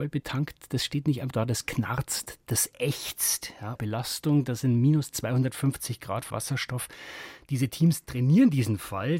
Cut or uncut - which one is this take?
cut